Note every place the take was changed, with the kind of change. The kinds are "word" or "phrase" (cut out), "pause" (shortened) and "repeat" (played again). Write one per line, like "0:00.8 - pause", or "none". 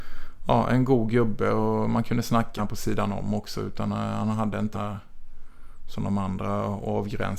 0:02.6 - word
0:04.7 - word

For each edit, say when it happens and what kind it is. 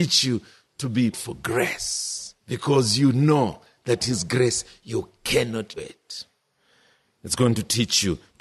0:01.1 - phrase
0:02.4 - pause
0:04.0 - word
0:05.8 - word

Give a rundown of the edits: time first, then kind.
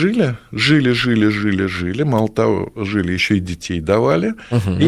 none

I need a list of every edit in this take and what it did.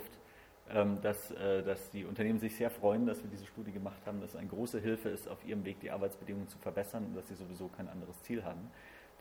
none

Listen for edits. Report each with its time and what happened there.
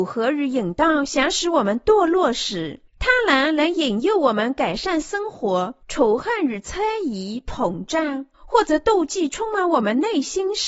0:02.9 - pause
0:05.8 - pause
0:08.3 - pause

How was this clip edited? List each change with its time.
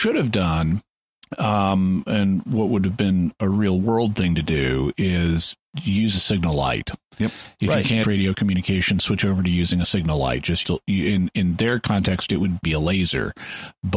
0:01.0 - pause
0:07.1 - pause
0:08.0 - phrase
0:10.6 - word
0:12.6 - word

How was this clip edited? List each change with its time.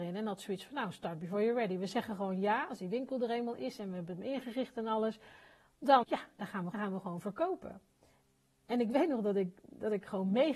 0:06.0 - word
0:06.7 - phrase

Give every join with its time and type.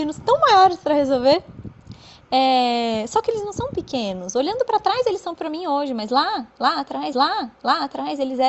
0:05.4 - word
0:07.1 - repeat

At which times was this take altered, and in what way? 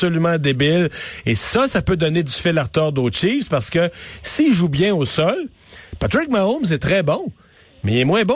none

